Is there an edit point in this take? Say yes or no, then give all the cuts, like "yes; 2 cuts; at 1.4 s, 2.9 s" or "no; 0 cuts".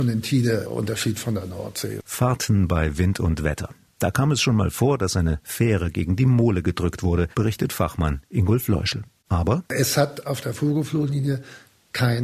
yes; 1 cut; at 7.3 s